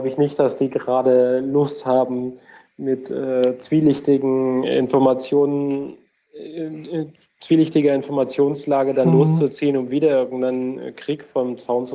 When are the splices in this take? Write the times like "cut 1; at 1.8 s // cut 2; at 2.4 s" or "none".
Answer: none